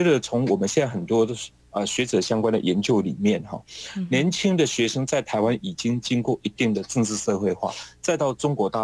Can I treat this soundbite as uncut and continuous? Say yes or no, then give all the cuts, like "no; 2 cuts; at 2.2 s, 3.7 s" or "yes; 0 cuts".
yes; 0 cuts